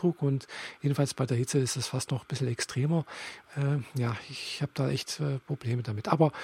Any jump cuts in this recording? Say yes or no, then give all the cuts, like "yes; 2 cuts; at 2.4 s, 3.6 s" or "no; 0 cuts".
no; 0 cuts